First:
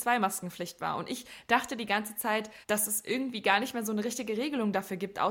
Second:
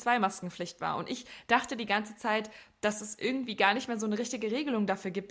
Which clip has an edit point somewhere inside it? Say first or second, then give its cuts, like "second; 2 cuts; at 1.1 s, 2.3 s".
first; 1 cut; at 2.6 s